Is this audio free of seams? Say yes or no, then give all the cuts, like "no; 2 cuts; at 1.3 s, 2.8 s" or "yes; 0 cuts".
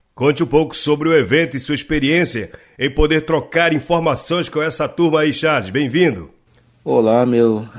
yes; 0 cuts